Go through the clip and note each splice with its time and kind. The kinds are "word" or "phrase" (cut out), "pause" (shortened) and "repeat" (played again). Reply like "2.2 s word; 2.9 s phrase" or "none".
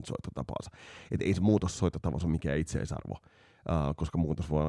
none